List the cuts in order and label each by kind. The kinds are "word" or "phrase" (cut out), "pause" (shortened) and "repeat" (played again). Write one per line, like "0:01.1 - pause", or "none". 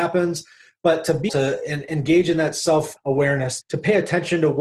0:01.3 - word
0:03.6 - word